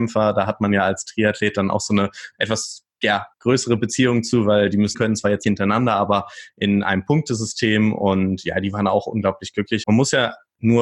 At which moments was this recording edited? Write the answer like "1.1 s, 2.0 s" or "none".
3.3 s, 4.9 s, 5.4 s, 9.8 s